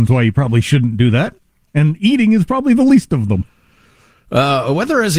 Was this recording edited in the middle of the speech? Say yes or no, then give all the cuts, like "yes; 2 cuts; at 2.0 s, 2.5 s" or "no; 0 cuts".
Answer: no; 0 cuts